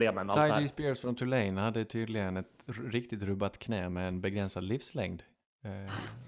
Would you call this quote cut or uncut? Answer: uncut